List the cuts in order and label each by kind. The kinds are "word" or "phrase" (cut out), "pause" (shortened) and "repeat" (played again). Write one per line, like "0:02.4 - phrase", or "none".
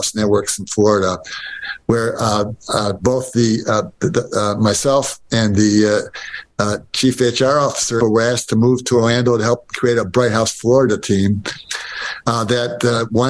0:08.0 - phrase